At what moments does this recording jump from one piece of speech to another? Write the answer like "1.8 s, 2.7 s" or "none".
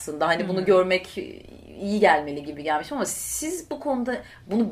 none